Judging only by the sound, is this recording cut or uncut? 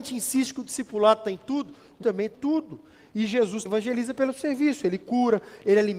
cut